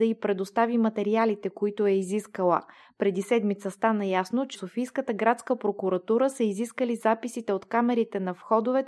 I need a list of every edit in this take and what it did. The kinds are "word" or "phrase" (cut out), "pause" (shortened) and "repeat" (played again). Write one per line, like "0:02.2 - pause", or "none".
0:04.6 - word